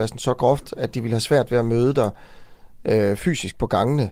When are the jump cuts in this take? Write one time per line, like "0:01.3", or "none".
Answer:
none